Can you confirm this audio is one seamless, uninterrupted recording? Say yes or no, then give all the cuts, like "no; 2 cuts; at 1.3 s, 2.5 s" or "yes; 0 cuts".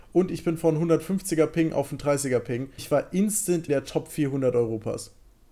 no; 2 cuts; at 2.8 s, 3.7 s